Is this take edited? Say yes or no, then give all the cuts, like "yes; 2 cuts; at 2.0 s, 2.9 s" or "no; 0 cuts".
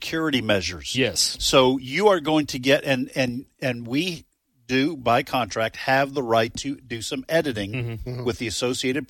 no; 0 cuts